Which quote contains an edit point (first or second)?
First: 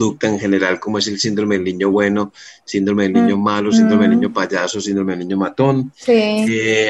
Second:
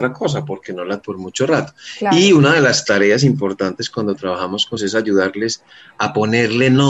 second